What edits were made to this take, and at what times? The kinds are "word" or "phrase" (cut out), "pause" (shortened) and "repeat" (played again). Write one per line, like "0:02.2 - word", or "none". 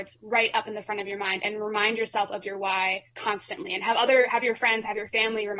0:03.1 - pause